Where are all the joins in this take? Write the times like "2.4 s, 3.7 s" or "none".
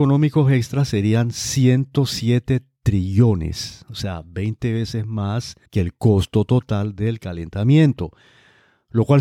5.7 s